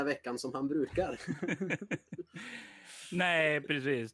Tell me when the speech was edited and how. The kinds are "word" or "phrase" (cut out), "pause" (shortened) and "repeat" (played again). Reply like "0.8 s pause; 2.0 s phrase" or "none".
none